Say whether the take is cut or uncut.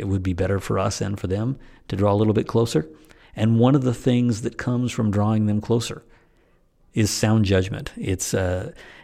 uncut